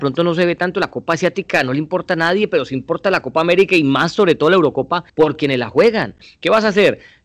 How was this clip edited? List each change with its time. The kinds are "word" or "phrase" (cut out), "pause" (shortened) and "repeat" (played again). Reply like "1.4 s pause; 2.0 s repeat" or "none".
5.1 s pause